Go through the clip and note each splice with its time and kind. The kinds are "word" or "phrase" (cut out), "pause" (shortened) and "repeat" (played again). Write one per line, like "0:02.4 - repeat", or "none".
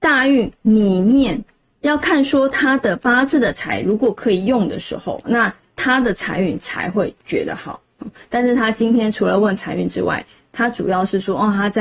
0:05.2 - word